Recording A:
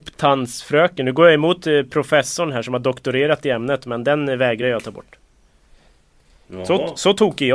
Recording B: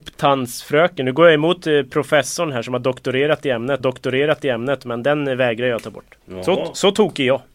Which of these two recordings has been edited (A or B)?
B